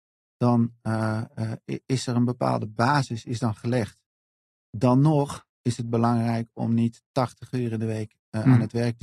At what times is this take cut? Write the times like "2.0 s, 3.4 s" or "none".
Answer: 5.5 s